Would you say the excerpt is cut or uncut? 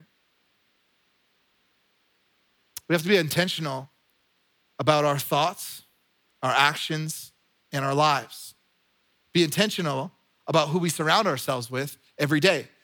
uncut